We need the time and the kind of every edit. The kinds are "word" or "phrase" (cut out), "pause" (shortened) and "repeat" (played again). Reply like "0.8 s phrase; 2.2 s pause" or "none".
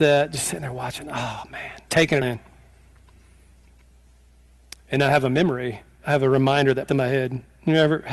1.9 s word; 2.2 s word; 6.9 s word